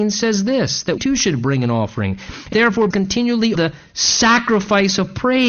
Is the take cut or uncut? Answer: cut